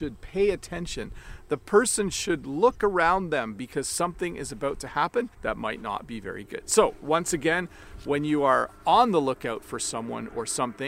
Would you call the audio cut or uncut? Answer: cut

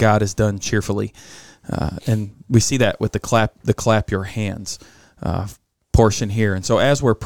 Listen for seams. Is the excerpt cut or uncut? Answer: uncut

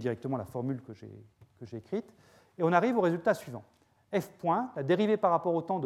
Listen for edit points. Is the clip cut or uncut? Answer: uncut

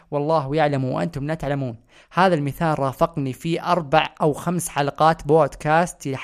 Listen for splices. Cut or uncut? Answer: uncut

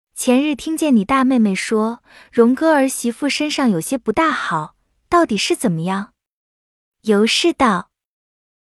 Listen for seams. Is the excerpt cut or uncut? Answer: uncut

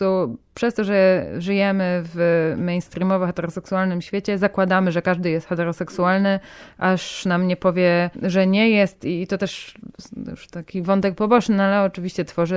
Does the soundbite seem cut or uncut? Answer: uncut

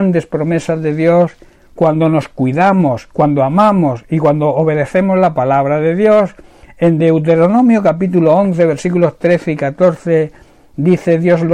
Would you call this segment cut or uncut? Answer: uncut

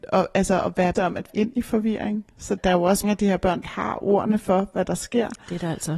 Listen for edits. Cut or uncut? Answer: cut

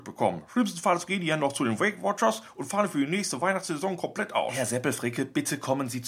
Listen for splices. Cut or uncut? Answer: uncut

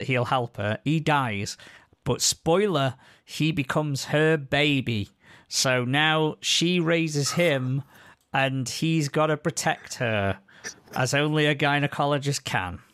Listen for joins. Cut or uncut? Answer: uncut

